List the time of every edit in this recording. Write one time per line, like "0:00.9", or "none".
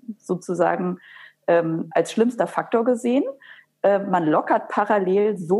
none